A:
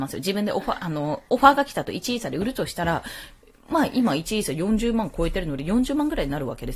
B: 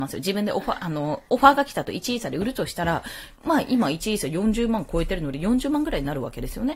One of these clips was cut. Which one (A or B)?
B